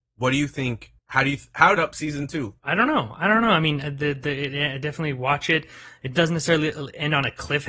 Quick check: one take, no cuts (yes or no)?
no